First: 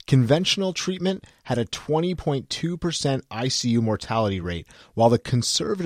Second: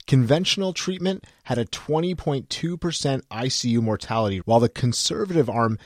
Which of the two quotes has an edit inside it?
second; 1 cut; at 4.4 s

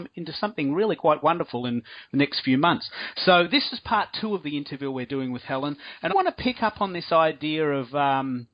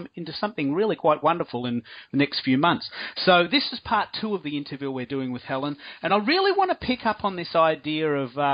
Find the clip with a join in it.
first; 1 cut; at 6.1 s

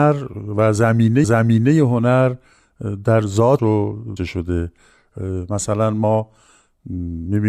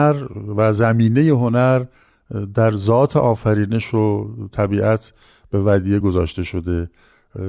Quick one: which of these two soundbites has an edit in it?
first; 3 cuts; at 1.2 s, 3.6 s, 4.2 s

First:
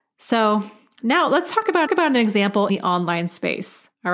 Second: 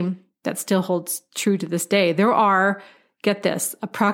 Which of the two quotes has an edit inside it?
first; 2 cuts; at 1.9 s, 2.7 s

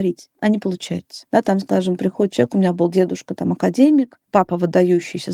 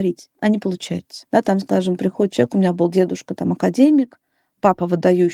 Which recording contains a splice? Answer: first; 1 cut; at 4.2 s

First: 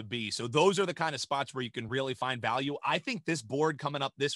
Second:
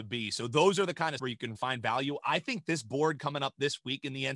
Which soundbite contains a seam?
second; 2 cuts; at 1.2 s, 1.5 s

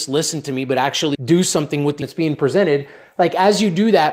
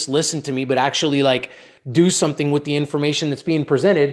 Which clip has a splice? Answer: first; 2 cuts; at 1.1 s, 2.0 s

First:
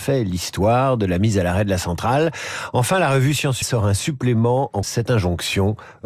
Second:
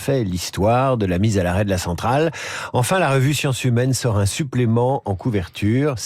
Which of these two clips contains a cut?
first; 2 cuts; at 3.6 s, 4.8 s

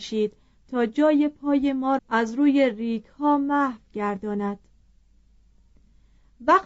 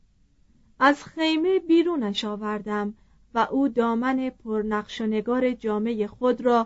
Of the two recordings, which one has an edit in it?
first; 1 cut; at 2.0 s

